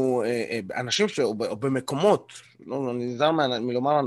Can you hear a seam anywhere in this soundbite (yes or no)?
no